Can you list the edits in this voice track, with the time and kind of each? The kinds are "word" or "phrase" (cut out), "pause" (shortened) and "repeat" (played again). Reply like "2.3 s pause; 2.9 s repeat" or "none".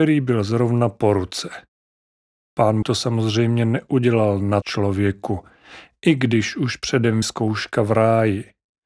2.8 s word; 4.6 s word; 7.2 s phrase